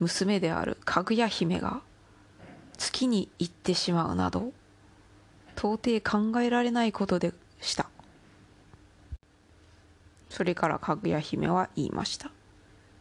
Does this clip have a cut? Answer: no; 0 cuts

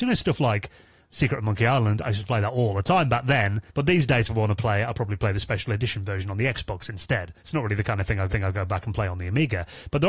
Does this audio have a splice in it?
yes; 3 cuts; at 3.7 s, 7.4 s, 8.3 s

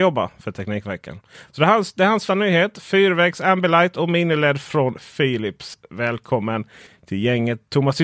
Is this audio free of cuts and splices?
no; 1 cut; at 2.3 s

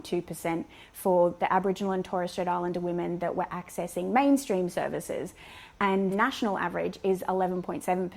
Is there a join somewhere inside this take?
no; 0 cuts

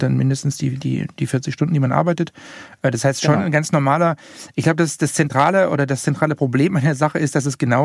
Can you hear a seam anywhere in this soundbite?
no; 0 cuts

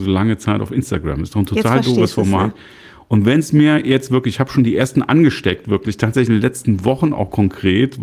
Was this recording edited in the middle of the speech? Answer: no; 0 cuts

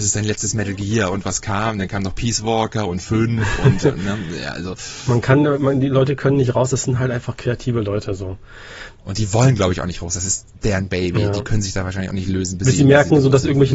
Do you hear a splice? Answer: no; 0 cuts

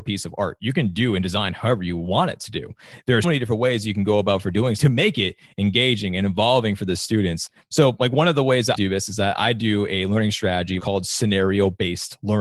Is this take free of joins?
no; 4 cuts; at 3.2 s, 4.8 s, 8.8 s, 10.8 s

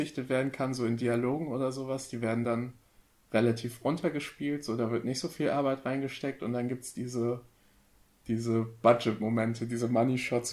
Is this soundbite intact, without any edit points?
yes; 0 cuts

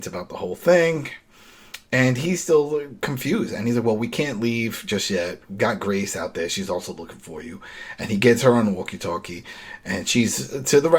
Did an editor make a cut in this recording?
no; 0 cuts

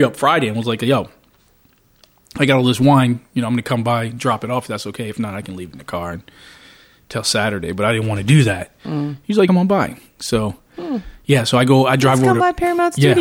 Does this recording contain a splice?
yes; 1 cut; at 9.5 s

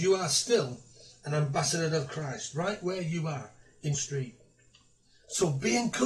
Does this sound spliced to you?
yes; 1 cut; at 3.9 s

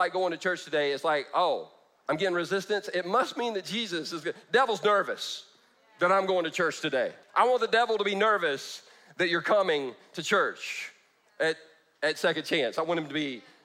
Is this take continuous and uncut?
no; 1 cut; at 7.2 s

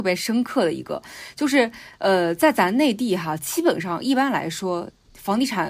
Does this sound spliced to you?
no; 0 cuts

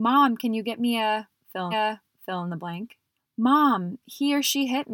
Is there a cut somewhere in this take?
yes; 2 cuts; at 1.7 s, 3.2 s

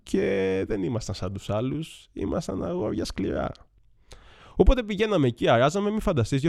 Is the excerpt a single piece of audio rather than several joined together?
yes; 0 cuts

